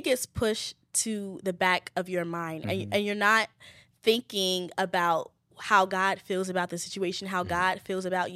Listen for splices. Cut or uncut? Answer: uncut